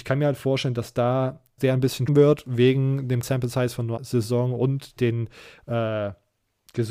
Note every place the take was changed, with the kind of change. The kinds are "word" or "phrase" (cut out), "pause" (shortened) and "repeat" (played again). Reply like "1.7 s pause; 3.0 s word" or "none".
1.6 s word; 2.1 s word; 3.2 s word; 4.0 s word; 5.0 s word